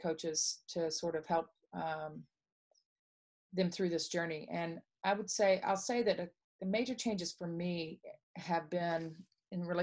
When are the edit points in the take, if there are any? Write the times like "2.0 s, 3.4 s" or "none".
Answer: 6.4 s, 8.2 s